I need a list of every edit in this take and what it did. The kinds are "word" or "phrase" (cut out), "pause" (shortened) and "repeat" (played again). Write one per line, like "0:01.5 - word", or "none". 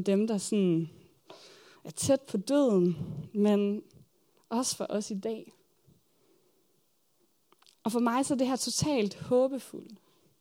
none